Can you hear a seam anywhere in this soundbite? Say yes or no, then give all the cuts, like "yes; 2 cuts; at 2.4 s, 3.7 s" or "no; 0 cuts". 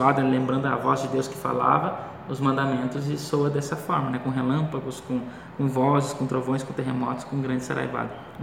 no; 0 cuts